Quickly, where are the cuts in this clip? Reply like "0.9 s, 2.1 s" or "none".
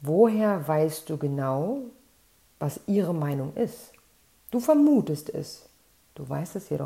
none